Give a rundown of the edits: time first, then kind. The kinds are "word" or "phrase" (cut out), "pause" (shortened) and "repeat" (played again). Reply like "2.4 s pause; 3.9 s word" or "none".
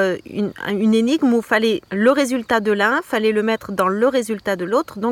1.9 s pause

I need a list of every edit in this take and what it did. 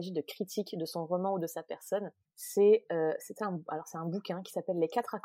2.3 s pause

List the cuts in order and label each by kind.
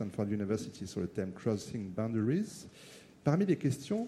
none

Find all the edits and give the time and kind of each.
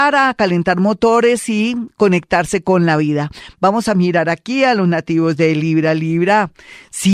none

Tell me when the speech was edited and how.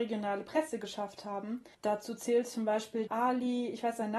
1.7 s pause; 3.1 s word

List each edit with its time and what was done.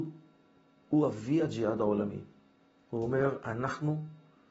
none

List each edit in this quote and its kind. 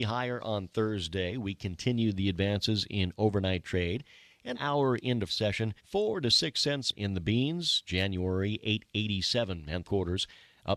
4.5 s word; 5.3 s word; 5.8 s pause; 6.9 s word; 9.8 s word

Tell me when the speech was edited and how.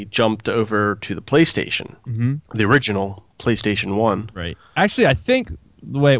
2.4 s pause; 3.3 s pause

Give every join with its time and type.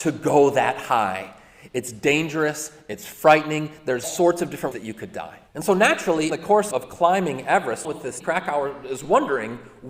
4.0 s word; 4.7 s word; 5.5 s pause; 6.3 s word; 6.7 s word; 7.8 s word; 8.2 s word

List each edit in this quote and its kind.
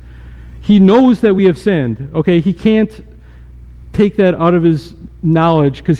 none

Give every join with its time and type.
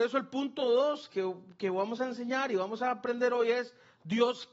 none

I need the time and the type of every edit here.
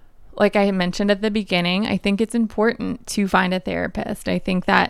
none

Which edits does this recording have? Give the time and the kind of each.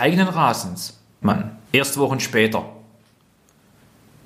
1.2 s word; 1.6 s pause

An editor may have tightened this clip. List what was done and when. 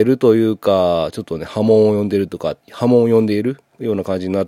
2.6 s pause

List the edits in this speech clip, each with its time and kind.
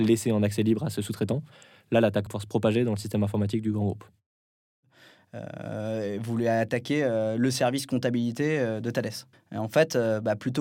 2.3 s word; 9.3 s pause

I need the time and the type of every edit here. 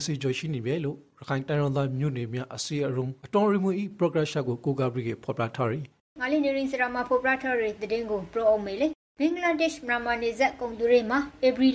6.0 s pause

